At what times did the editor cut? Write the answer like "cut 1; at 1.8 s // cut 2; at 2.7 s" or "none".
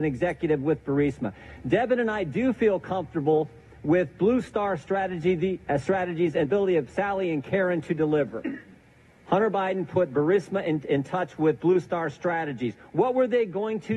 cut 1; at 6.4 s

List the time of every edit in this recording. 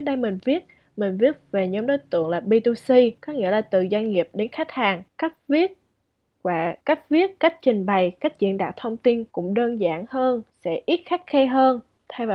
cut 1; at 3.2 s // cut 2; at 5.1 s // cut 3; at 6.8 s // cut 4; at 9.3 s // cut 5; at 10.5 s

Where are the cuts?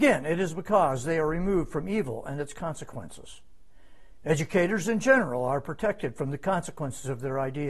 none

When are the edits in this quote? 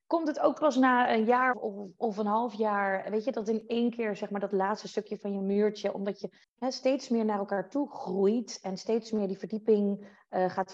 cut 1; at 1.5 s // cut 2; at 6.4 s

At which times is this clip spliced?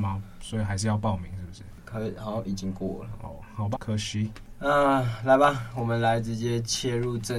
cut 1; at 3.7 s

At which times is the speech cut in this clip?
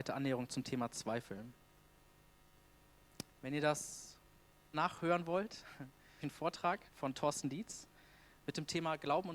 cut 1; at 4.7 s // cut 2; at 6.2 s // cut 3; at 6.9 s

